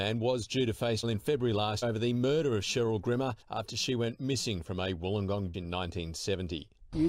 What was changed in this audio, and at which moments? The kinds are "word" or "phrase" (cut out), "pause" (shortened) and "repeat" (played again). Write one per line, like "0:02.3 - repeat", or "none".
0:01.0 - word
0:01.8 - word
0:03.4 - pause
0:05.5 - word